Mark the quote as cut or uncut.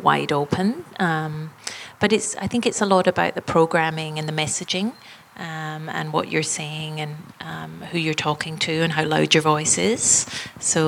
uncut